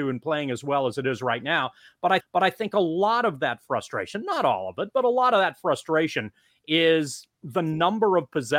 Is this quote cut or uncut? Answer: cut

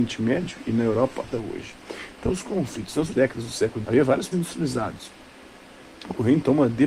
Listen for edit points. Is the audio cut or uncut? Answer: cut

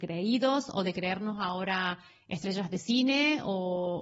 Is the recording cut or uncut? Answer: uncut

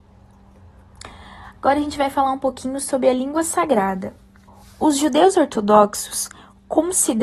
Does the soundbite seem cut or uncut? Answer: cut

